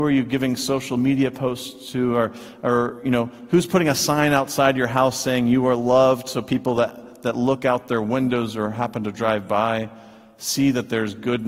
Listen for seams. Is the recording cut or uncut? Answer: uncut